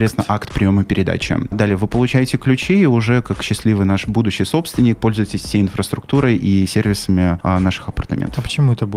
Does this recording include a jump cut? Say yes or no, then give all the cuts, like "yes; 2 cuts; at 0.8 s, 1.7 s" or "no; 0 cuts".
no; 0 cuts